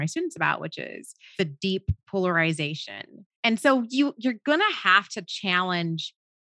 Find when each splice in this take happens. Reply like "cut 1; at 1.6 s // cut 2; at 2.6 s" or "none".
cut 1; at 1.3 s // cut 2; at 3.3 s